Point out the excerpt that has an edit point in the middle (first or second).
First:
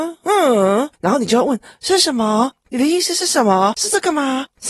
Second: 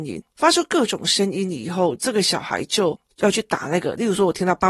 first